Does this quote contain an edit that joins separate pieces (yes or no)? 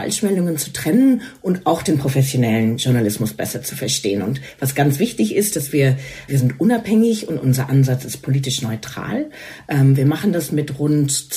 yes